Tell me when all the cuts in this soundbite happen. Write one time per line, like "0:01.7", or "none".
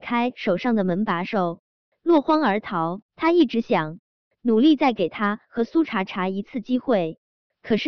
0:03.1